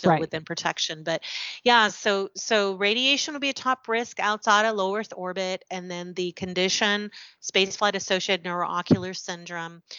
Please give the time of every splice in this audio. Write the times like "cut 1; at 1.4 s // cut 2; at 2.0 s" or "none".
none